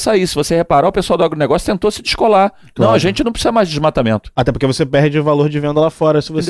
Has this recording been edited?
no; 0 cuts

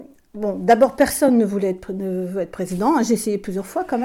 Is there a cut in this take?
no; 0 cuts

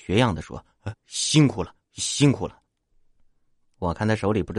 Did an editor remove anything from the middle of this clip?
yes; 3 cuts; at 0.9 s, 1.8 s, 2.7 s

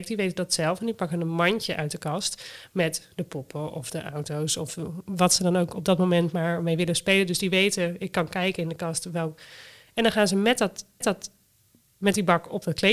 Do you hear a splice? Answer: yes; 1 cut; at 11.0 s

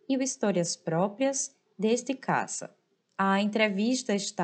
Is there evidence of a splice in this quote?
no; 0 cuts

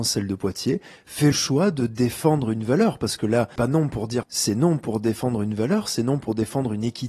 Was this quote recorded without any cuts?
no; 3 cuts; at 1.3 s, 3.6 s, 4.2 s

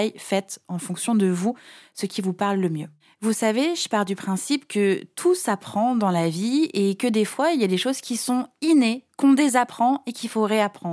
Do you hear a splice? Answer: no; 0 cuts

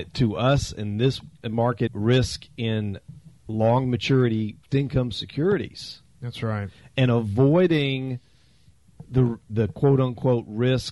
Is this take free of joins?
no; 3 cuts; at 1.9 s, 3.4 s, 4.7 s

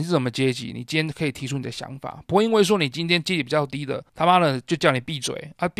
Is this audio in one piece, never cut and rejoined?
no; 1 cut; at 4.1 s

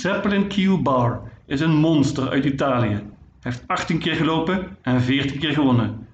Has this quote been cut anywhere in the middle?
no; 0 cuts

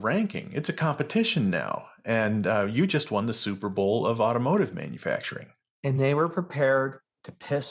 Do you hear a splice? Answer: no; 0 cuts

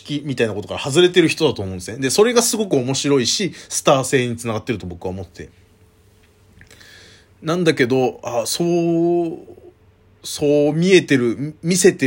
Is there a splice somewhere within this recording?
no; 0 cuts

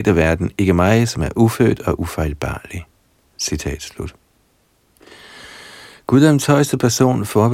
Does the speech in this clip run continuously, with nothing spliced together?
yes; 0 cuts

